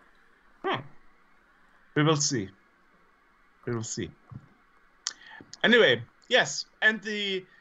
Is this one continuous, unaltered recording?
yes; 0 cuts

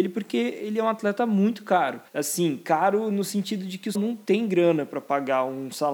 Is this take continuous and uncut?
no; 2 cuts; at 2.1 s, 3.9 s

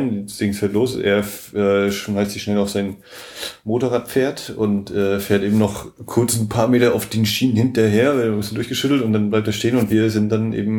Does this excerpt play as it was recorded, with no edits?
yes; 0 cuts

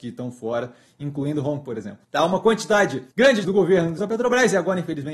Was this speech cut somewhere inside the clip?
yes; 5 cuts; at 1.6 s, 2.0 s, 3.1 s, 3.4 s, 4.0 s

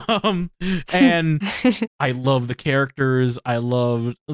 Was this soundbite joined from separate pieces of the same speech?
yes; 1 cut; at 1.9 s

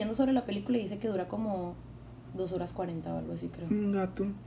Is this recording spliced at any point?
no; 0 cuts

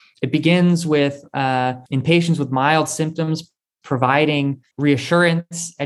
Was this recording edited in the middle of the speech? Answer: yes; 2 cuts; at 1.9 s, 4.7 s

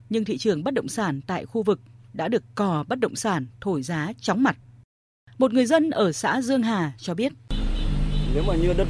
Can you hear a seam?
no; 0 cuts

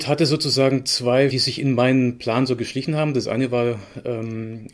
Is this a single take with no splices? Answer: no; 1 cut; at 1.3 s

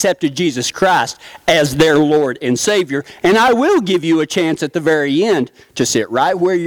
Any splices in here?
no; 0 cuts

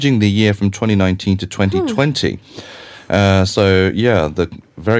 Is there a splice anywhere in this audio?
no; 0 cuts

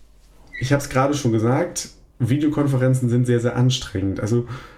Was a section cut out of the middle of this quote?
no; 0 cuts

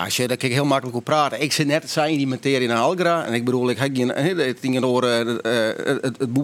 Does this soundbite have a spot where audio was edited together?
no; 0 cuts

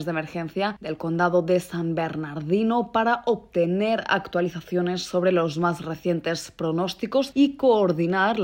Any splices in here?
no; 0 cuts

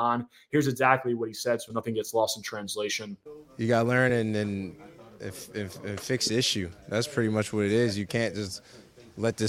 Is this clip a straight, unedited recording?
yes; 0 cuts

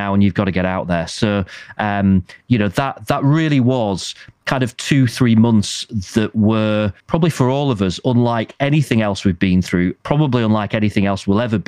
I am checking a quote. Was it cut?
yes; 2 cuts; at 7.0 s, 10.0 s

